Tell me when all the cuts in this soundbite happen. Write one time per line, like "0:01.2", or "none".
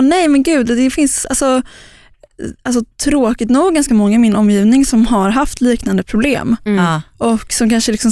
none